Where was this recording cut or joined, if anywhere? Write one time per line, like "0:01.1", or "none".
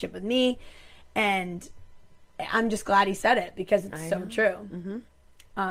none